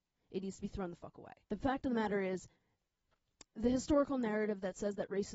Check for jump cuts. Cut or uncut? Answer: cut